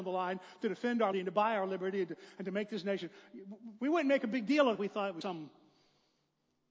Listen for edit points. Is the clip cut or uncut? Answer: cut